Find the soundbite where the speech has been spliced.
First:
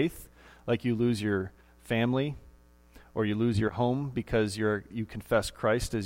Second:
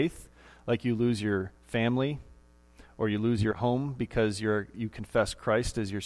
second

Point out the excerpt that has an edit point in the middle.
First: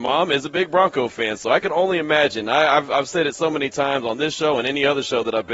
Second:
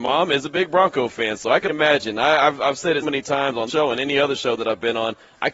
second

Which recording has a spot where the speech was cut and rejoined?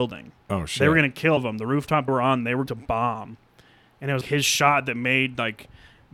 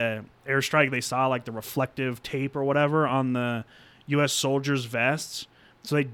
first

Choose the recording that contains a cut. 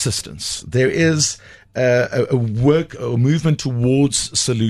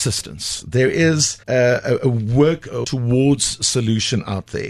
second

